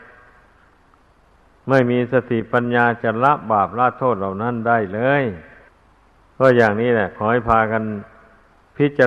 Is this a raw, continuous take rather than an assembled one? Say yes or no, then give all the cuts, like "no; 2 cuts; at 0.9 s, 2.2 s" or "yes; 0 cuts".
no; 1 cut; at 5.7 s